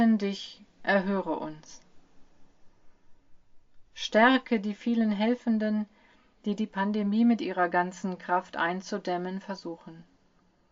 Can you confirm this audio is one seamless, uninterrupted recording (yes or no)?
yes